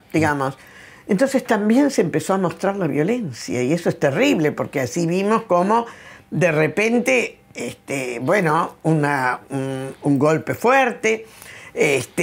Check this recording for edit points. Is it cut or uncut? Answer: uncut